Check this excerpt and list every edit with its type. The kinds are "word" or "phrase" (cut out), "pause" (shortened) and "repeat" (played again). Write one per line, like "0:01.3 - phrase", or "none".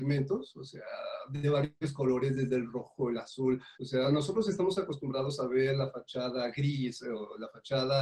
0:03.7 - pause